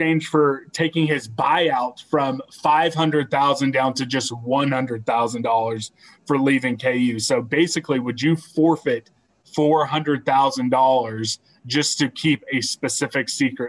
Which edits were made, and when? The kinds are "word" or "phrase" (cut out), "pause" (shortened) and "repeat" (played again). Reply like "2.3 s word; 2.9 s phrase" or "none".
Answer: none